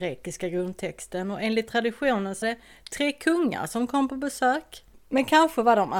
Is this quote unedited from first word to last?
no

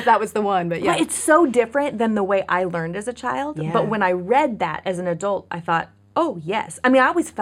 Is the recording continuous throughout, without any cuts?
yes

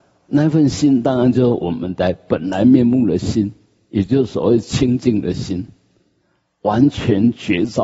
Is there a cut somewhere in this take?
no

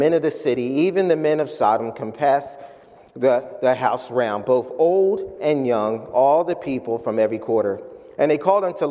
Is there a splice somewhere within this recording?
no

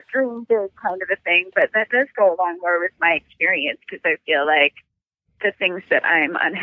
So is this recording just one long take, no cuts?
yes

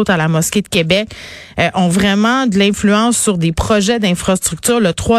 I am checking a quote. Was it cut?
no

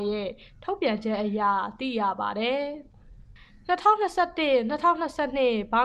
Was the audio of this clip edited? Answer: no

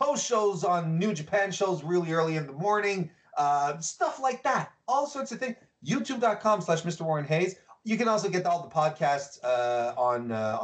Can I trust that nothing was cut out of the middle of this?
yes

